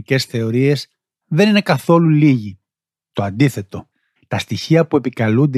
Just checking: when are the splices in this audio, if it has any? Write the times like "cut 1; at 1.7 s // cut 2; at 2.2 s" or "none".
none

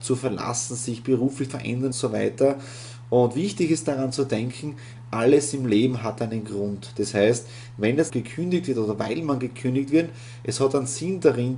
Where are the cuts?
cut 1; at 1.5 s // cut 2; at 1.9 s // cut 3; at 8.1 s

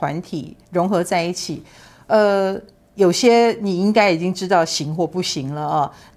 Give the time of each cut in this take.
none

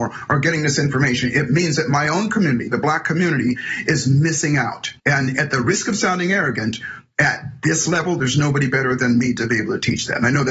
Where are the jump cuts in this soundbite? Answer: cut 1; at 5.0 s

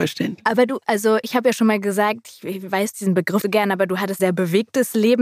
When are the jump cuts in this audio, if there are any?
cut 1; at 2.9 s // cut 2; at 3.4 s // cut 3; at 4.2 s

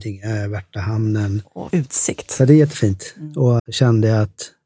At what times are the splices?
cut 1; at 1.7 s // cut 2; at 3.6 s

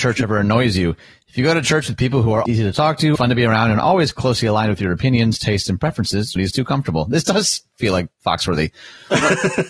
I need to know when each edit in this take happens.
cut 1; at 2.5 s // cut 2; at 3.2 s // cut 3; at 6.4 s

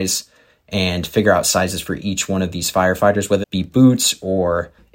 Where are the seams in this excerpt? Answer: cut 1; at 3.4 s

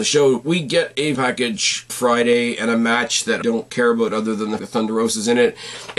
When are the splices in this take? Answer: cut 1; at 1.1 s // cut 2; at 1.9 s // cut 3; at 3.4 s // cut 4; at 4.6 s

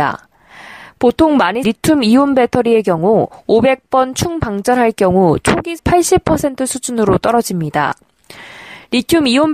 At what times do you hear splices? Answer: cut 1; at 1.6 s // cut 2; at 5.8 s

